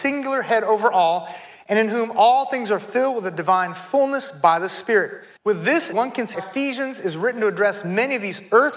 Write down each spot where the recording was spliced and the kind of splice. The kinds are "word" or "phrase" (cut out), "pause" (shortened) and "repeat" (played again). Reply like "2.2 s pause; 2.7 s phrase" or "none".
5.4 s pause; 5.9 s phrase; 6.3 s word